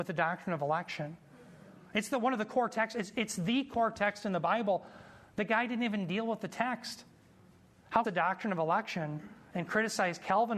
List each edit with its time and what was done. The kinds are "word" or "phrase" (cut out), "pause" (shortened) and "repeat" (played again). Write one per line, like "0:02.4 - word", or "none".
0:08.0 - phrase